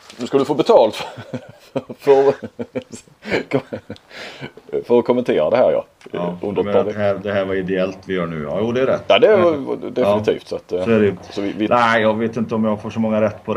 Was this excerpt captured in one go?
yes; 0 cuts

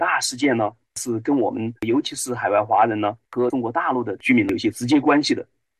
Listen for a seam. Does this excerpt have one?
yes; 1 cut; at 1.8 s

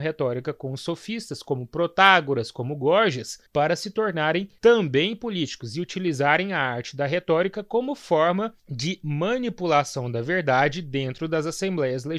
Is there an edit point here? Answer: yes; 2 cuts; at 3.5 s, 8.6 s

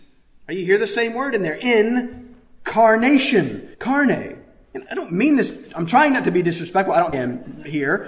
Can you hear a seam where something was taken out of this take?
yes; 3 cuts; at 3.7 s, 4.9 s, 7.1 s

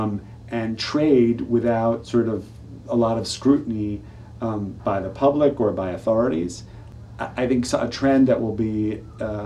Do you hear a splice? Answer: no; 0 cuts

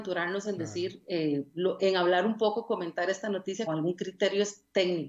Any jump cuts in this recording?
yes; 2 cuts; at 1.8 s, 3.7 s

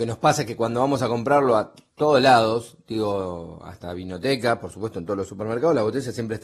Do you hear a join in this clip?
no; 0 cuts

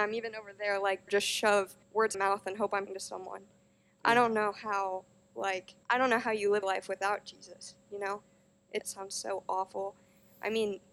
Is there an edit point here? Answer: yes; 7 cuts; at 1.1 s, 1.8 s, 2.1 s, 2.9 s, 5.8 s, 6.6 s, 8.8 s

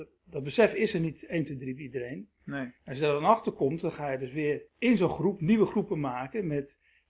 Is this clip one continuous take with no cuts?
no; 2 cuts; at 2.8 s, 4.7 s

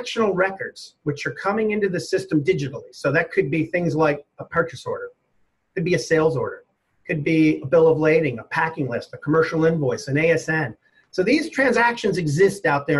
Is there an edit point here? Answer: no; 0 cuts

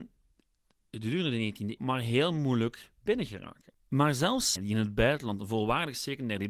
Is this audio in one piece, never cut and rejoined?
no; 3 cuts; at 1.8 s, 3.8 s, 4.6 s

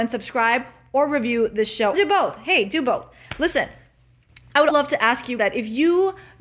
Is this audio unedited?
no; 3 cuts; at 1.9 s, 4.7 s, 5.4 s

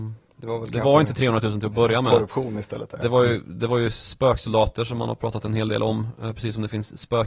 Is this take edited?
no; 0 cuts

